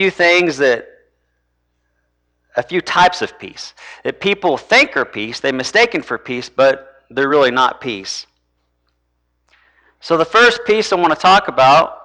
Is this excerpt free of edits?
yes; 0 cuts

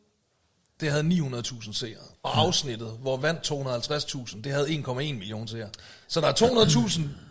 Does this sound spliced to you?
yes; 3 cuts; at 2.1 s, 3.2 s, 6.0 s

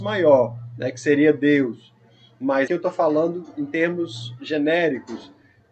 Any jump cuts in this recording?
yes; 1 cut; at 2.7 s

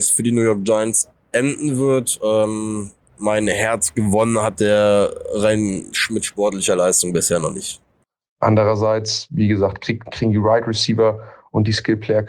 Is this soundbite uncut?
no; 1 cut; at 3.1 s

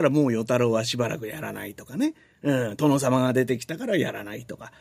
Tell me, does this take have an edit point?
no; 0 cuts

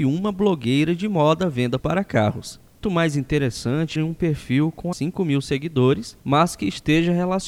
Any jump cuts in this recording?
yes; 4 cuts; at 1.8 s, 2.8 s, 4.0 s, 4.9 s

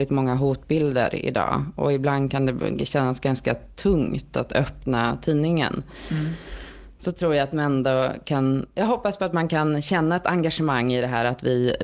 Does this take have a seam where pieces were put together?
no; 0 cuts

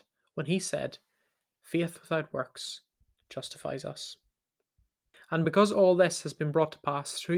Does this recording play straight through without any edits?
yes; 0 cuts

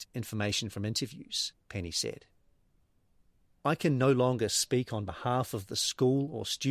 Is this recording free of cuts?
yes; 0 cuts

